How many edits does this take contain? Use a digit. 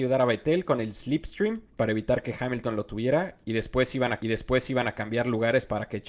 1